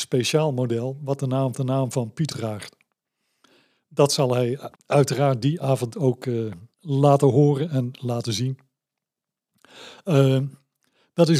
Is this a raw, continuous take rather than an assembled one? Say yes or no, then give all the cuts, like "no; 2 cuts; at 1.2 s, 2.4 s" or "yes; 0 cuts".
no; 4 cuts; at 1.5 s, 2.3 s, 4.7 s, 6.7 s